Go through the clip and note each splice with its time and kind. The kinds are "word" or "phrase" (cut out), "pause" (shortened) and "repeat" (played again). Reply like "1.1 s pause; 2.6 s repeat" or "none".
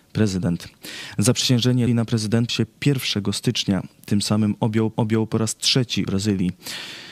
1.9 s word; 2.5 s word; 4.9 s repeat; 6.1 s phrase